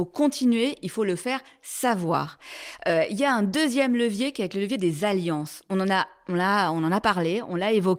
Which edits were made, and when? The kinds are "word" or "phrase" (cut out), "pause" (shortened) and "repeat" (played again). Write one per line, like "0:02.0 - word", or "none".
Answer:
none